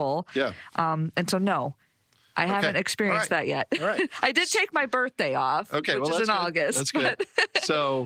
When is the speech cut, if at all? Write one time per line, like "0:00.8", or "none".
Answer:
none